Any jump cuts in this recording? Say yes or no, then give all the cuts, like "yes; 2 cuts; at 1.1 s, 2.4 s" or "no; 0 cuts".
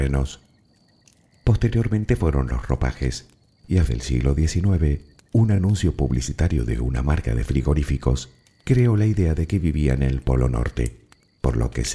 yes; 1 cut; at 3.9 s